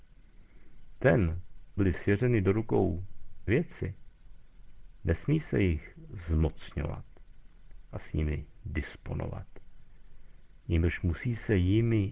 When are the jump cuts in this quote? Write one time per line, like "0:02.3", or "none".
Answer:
0:01.8
0:03.5